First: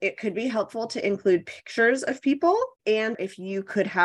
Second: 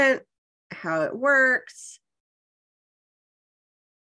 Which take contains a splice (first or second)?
first